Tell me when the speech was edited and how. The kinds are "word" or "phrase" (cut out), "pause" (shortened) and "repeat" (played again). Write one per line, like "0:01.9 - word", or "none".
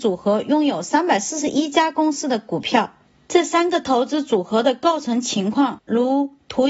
none